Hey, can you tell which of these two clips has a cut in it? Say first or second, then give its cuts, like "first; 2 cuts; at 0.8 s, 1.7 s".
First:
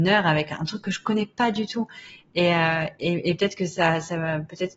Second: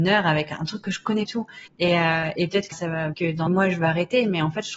second; 6 cuts; at 1.3 s, 1.7 s, 2.4 s, 2.7 s, 3.1 s, 3.5 s